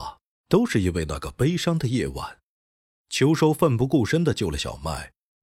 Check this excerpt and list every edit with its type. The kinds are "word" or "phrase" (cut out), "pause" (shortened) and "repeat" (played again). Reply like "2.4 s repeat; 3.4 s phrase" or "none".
none